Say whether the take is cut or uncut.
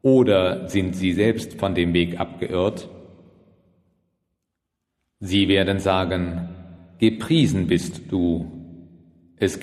uncut